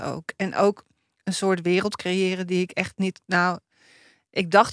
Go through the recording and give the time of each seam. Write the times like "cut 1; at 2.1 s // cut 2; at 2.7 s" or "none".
none